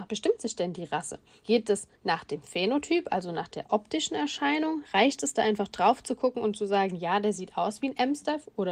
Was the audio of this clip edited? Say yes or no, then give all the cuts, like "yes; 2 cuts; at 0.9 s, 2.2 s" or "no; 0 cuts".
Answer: no; 0 cuts